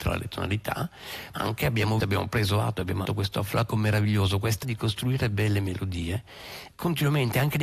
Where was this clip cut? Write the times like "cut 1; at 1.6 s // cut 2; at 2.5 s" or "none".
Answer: cut 1; at 1.3 s // cut 2; at 2.0 s // cut 3; at 3.0 s // cut 4; at 3.7 s // cut 5; at 4.6 s // cut 6; at 6.7 s

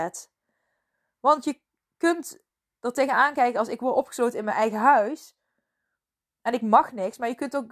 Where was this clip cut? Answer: none

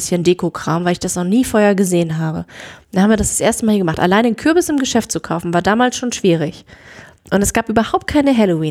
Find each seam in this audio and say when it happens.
none

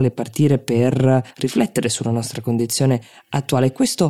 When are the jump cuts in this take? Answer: cut 1; at 1.3 s

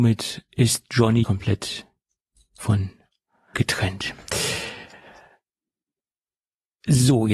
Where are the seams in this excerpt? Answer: cut 1; at 1.2 s // cut 2; at 3.5 s

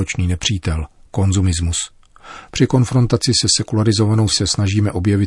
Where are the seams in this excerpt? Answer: cut 1; at 4.3 s

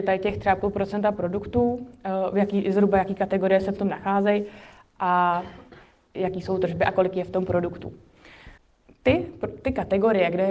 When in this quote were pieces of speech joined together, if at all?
none

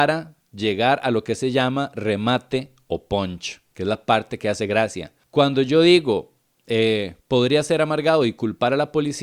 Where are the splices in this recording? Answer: cut 1; at 5.2 s // cut 2; at 7.2 s

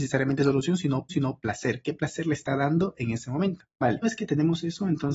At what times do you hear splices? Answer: cut 1; at 1.1 s // cut 2; at 4.0 s

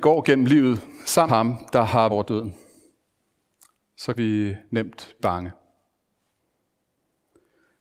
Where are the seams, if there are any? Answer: cut 1; at 1.3 s // cut 2; at 2.1 s // cut 3; at 4.1 s // cut 4; at 5.2 s

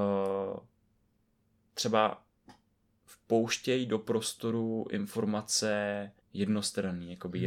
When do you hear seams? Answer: cut 1; at 6.2 s

